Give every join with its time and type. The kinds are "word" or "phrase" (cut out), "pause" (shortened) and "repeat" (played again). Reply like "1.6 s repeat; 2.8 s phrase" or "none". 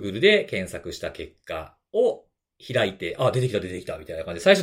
none